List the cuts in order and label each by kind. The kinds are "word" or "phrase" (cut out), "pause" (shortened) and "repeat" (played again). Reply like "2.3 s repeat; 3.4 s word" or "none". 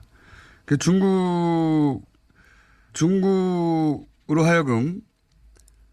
2.9 s word